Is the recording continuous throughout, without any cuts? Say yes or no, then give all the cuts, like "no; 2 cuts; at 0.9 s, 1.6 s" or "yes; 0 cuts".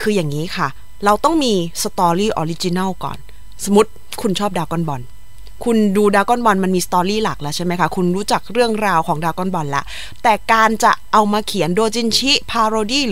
no; 1 cut; at 3.6 s